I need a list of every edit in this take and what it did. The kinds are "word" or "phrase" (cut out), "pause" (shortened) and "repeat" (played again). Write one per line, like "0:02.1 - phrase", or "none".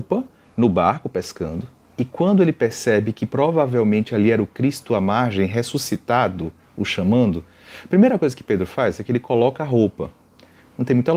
none